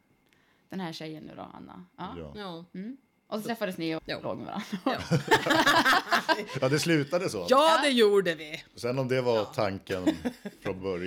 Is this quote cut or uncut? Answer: cut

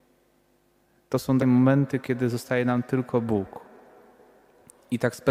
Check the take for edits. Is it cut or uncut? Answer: cut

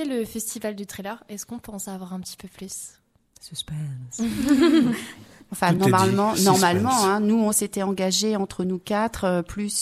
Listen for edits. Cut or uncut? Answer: uncut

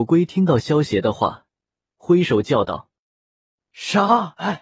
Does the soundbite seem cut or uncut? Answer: cut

